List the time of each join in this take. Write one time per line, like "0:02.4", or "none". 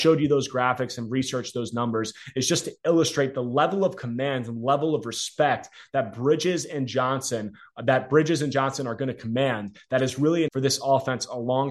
0:10.5